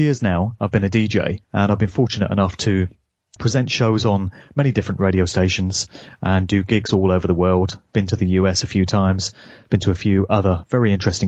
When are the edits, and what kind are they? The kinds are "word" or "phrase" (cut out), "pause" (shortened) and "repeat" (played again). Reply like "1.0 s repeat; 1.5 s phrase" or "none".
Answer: 1.4 s pause; 3.4 s word